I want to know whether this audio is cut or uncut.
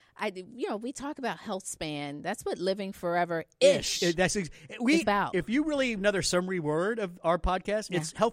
cut